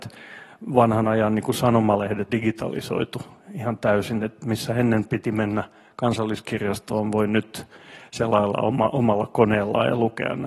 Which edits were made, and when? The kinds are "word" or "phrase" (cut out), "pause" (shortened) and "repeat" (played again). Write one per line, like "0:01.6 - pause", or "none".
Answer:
0:02.3 - word